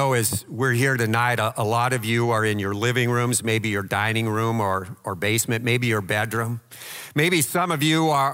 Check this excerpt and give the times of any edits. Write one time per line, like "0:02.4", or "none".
none